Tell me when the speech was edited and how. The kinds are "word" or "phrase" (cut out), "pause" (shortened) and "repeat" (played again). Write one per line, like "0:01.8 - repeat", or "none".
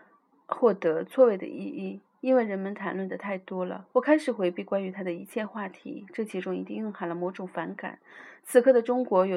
0:03.9 - pause

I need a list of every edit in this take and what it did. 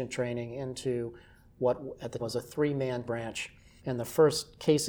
0:02.2 - word
0:03.0 - word

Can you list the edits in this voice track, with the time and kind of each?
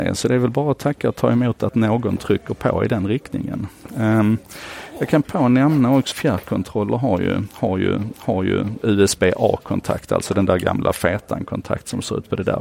0:05.2 - word
0:06.1 - word
0:08.1 - repeat

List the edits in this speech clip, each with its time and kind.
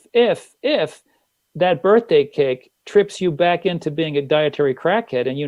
none

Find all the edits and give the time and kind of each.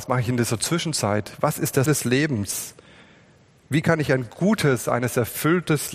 0:01.9 - word

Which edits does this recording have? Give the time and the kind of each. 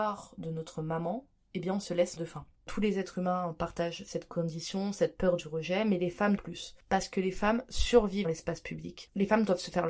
0:02.2 - word
0:02.6 - pause
0:06.4 - word
0:08.2 - word

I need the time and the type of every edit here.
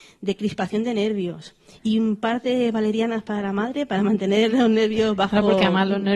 none

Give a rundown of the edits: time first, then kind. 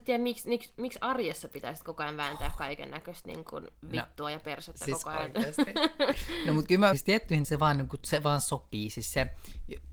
0:06.9 - word
0:07.4 - word

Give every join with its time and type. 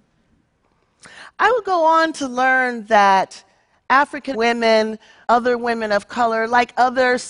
0:04.3 - word
0:05.2 - word

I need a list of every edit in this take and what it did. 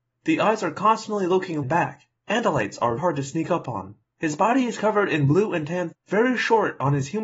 0:01.6 - phrase
0:02.2 - pause
0:03.0 - word
0:04.1 - pause
0:05.9 - word

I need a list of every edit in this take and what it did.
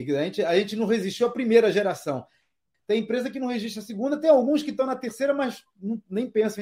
none

